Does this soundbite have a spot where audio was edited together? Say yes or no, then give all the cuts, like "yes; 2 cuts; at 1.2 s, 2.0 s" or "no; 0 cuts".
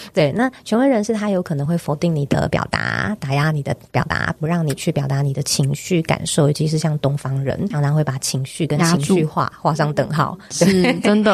yes; 1 cut; at 7.7 s